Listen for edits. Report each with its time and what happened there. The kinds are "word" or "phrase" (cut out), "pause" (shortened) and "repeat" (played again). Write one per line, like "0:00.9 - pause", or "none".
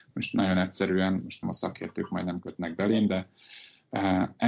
0:01.4 - word